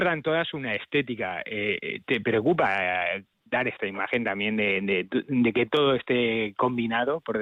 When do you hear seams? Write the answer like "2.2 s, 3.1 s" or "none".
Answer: none